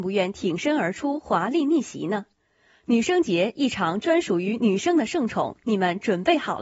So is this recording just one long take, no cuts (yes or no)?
yes